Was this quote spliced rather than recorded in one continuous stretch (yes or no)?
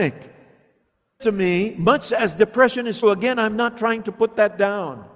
yes